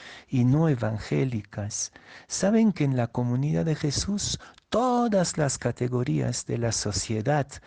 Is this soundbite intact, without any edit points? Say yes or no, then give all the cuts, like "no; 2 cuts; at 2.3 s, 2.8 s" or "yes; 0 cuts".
yes; 0 cuts